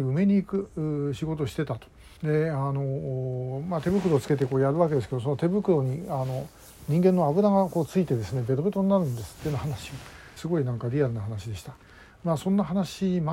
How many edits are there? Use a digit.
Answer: 2